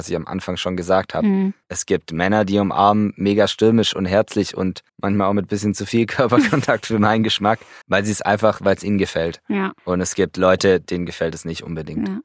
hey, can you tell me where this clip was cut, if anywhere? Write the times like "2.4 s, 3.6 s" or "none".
1.6 s, 4.9 s, 7.8 s, 9.8 s